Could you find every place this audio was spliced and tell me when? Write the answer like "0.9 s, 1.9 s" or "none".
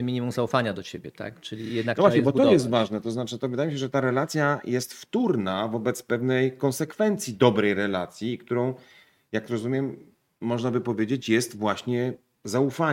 none